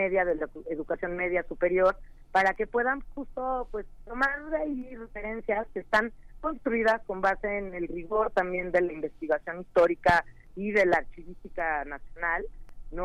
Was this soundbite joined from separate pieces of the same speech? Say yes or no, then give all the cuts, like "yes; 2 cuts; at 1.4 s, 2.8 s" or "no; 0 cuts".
no; 0 cuts